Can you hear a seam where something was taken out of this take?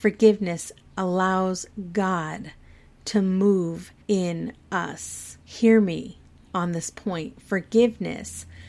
yes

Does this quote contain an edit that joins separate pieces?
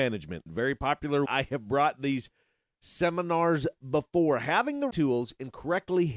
yes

